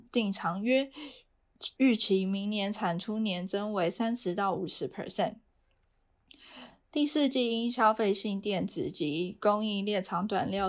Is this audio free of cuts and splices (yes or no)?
no